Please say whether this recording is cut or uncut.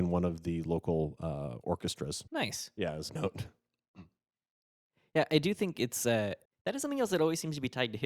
cut